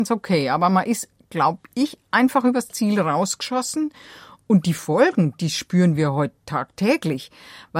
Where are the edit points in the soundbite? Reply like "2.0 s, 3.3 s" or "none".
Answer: none